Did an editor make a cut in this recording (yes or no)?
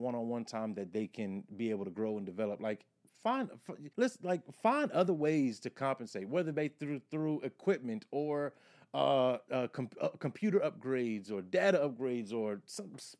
yes